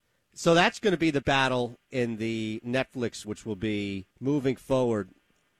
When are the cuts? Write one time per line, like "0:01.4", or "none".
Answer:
0:01.2
0:01.9
0:03.2
0:04.1